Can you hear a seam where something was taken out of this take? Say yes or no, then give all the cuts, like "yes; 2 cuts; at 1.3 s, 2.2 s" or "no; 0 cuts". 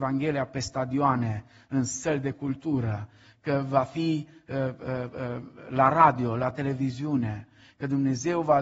no; 0 cuts